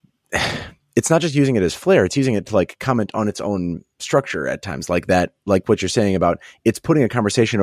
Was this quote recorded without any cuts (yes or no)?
yes